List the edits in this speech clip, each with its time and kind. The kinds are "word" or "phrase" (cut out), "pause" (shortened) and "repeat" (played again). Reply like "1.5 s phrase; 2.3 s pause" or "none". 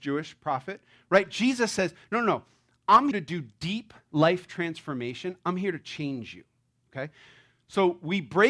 3.1 s word